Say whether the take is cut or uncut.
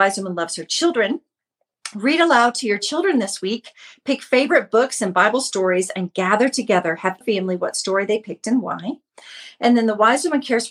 cut